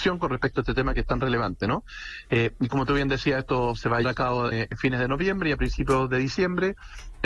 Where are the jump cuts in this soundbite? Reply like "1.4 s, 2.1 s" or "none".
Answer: 4.0 s, 4.5 s

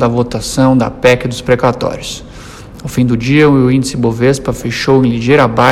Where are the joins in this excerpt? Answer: none

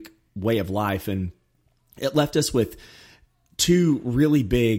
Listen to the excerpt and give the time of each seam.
none

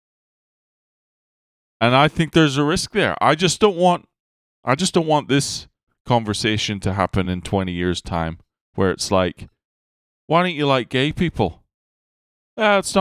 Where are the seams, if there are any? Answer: none

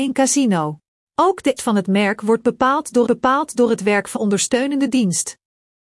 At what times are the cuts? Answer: 1.0 s, 1.6 s, 3.1 s, 4.2 s

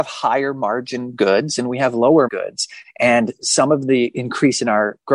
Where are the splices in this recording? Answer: 2.3 s

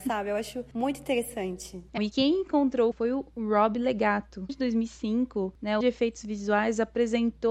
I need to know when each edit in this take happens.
2.0 s, 2.9 s, 4.5 s, 5.8 s

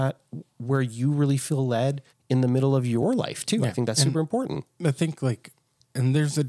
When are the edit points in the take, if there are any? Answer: 2.1 s

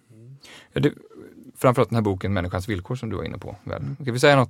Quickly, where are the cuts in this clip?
1.5 s

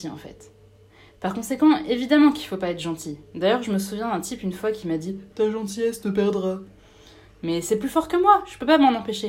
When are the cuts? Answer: none

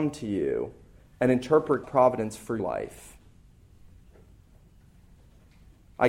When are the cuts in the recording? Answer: 1.8 s, 2.6 s

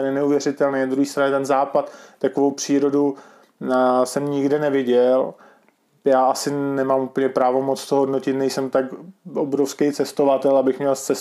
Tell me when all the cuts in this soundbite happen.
none

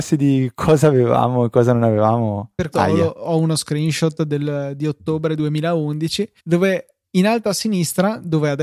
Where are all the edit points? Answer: 2.7 s, 6.4 s

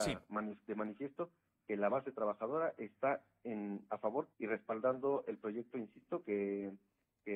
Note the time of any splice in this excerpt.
4.3 s

